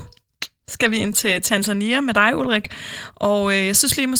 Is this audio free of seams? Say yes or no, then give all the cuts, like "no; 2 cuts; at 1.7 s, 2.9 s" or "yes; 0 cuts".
no; 1 cut; at 1.1 s